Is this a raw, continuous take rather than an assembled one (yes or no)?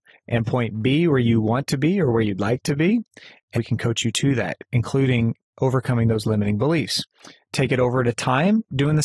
no